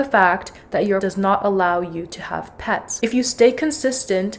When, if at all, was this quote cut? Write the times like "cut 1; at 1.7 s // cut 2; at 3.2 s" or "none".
cut 1; at 1.0 s